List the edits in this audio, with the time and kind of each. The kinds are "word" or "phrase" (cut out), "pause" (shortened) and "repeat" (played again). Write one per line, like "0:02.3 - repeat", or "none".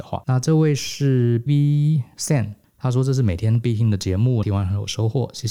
0:01.5 - word
0:02.6 - pause
0:04.4 - phrase